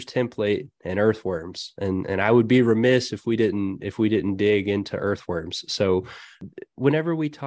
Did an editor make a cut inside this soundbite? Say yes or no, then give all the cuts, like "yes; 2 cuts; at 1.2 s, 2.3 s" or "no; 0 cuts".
no; 0 cuts